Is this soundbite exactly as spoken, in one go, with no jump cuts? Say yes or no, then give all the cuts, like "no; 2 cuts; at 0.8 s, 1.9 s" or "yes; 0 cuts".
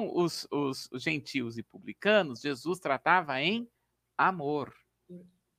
yes; 0 cuts